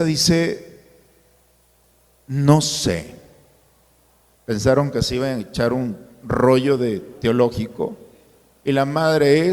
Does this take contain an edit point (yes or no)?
no